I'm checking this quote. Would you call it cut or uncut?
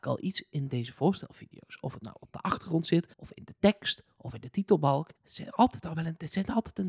cut